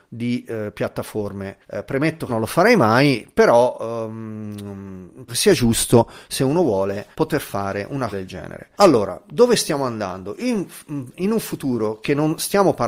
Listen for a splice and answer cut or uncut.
cut